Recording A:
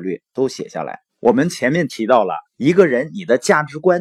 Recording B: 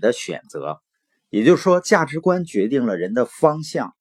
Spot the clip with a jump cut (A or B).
A